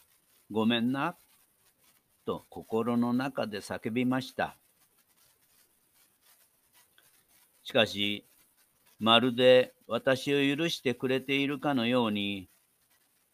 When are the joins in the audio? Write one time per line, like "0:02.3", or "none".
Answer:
0:02.5
0:09.8